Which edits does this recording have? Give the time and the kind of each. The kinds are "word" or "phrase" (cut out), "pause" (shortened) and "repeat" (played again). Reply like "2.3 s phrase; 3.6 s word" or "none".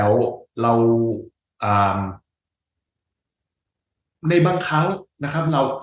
none